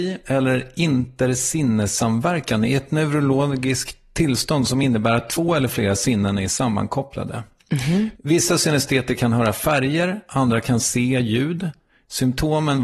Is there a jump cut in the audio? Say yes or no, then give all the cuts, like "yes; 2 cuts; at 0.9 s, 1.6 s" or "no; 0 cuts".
no; 0 cuts